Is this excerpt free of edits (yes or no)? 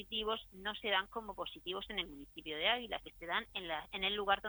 no